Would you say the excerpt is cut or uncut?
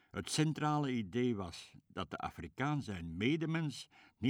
uncut